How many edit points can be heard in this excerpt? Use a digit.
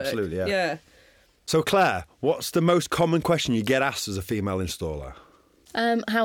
0